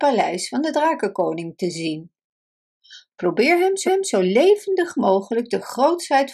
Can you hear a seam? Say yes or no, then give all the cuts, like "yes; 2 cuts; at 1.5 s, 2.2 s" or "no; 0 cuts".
yes; 1 cut; at 3.9 s